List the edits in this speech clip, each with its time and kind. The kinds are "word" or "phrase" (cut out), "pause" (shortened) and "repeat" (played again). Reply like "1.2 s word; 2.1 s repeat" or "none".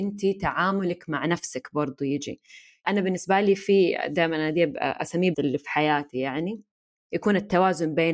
5.3 s word